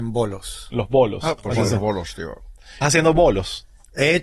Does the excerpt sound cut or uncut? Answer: cut